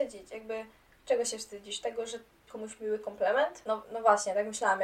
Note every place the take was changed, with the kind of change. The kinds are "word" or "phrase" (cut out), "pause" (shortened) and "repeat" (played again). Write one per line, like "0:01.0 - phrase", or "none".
0:02.5 - word